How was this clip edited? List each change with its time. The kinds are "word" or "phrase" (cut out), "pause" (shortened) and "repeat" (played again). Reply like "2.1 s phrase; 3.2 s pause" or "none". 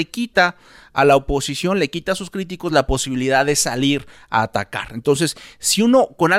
none

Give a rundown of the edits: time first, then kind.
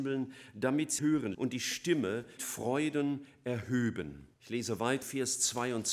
1.0 s word; 1.3 s word; 2.4 s word; 4.3 s pause; 5.0 s word

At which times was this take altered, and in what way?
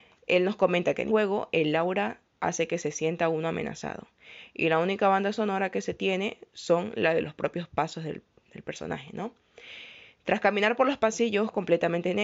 1.1 s phrase

